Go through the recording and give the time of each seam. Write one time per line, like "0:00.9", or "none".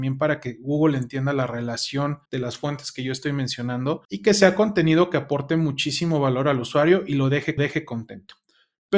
0:02.3
0:04.0
0:07.6